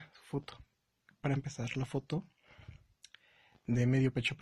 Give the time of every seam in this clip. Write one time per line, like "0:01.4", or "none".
none

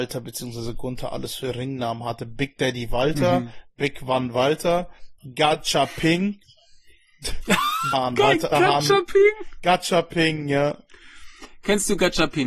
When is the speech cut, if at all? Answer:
0:07.9
0:08.5

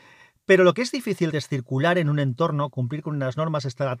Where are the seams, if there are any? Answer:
0:01.3

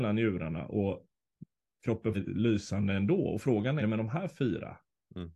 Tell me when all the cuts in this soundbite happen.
0:02.1
0:03.8

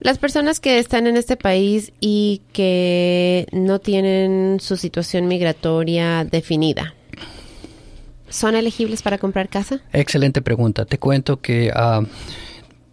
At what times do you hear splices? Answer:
0:09.9

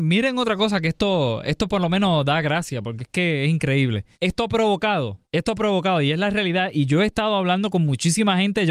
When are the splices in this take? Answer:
0:04.1
0:05.2

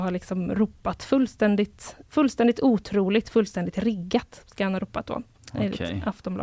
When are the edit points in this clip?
none

